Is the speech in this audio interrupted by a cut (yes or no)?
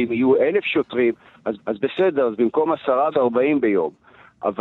yes